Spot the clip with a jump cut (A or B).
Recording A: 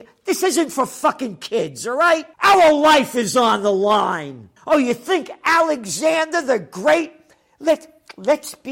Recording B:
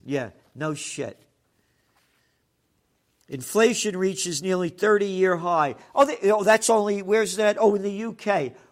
A